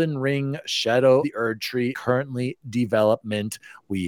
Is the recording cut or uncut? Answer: cut